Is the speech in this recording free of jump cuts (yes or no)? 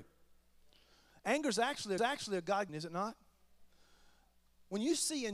no